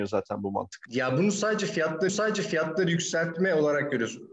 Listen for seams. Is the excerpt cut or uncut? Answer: cut